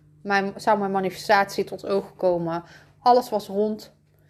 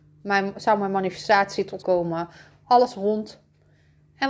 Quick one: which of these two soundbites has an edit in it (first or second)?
second